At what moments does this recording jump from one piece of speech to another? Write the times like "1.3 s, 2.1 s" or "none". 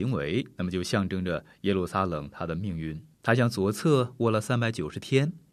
3.1 s